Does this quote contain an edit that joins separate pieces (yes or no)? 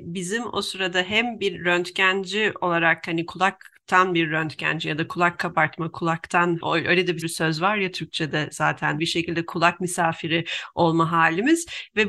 yes